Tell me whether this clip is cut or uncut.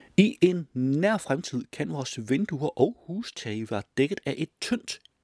uncut